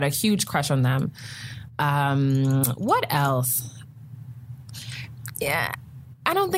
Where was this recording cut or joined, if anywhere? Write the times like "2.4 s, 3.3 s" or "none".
none